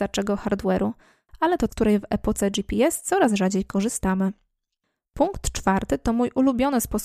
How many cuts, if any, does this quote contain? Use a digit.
1